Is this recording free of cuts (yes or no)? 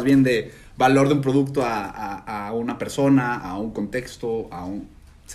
yes